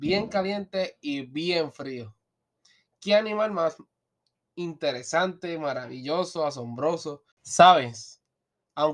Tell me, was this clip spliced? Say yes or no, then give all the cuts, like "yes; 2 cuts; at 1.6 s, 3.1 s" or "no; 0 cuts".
no; 0 cuts